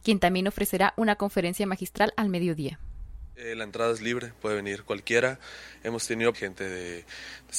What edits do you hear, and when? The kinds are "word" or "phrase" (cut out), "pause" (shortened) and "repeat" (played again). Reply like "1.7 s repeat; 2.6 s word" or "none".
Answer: 6.3 s phrase